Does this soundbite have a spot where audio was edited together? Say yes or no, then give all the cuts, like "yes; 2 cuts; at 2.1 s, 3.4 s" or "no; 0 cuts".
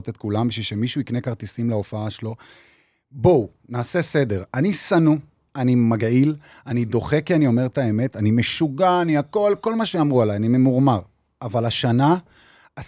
no; 0 cuts